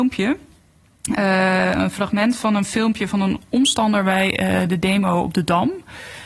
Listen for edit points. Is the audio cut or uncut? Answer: uncut